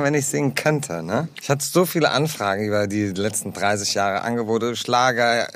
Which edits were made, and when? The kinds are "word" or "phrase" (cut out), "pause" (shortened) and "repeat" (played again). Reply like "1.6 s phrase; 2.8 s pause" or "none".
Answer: 1.3 s pause

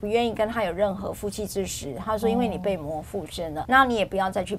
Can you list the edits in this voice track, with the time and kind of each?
3.6 s word

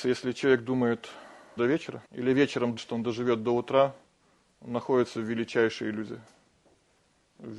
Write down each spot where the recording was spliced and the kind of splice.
1.6 s phrase; 2.0 s pause; 2.8 s word

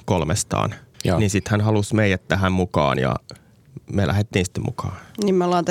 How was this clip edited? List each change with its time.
0.9 s pause; 3.8 s pause

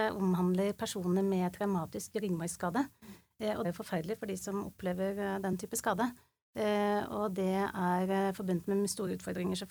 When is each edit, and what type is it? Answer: 3.6 s phrase

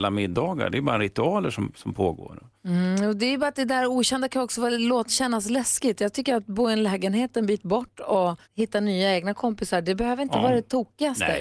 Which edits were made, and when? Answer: 2.6 s pause; 8.4 s pause

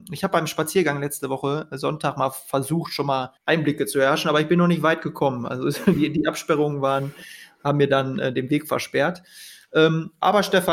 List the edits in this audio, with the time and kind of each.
3.4 s pause

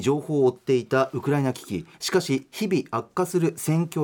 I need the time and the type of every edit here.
1.9 s pause

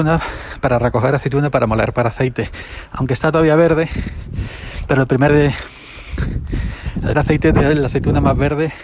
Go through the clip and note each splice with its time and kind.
5.3 s word; 7.1 s word

